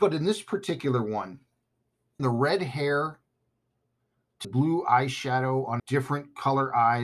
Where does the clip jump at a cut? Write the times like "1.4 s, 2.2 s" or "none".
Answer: 2.2 s, 4.4 s, 5.8 s